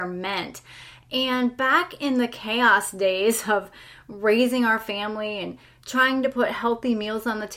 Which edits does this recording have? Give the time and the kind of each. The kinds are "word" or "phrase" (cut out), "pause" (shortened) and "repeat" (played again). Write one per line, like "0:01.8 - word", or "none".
none